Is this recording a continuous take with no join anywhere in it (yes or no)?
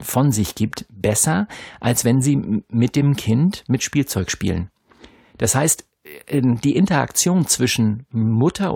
yes